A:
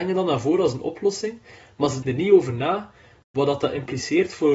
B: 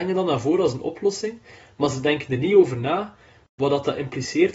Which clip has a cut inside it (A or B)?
A